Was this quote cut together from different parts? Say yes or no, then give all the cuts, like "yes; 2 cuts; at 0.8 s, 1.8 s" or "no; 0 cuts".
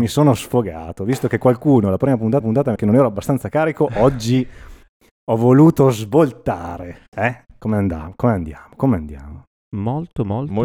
yes; 2 cuts; at 2.4 s, 2.8 s